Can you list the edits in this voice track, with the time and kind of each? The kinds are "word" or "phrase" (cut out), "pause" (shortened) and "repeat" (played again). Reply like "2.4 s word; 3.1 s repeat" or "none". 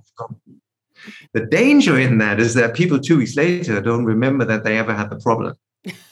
1.2 s pause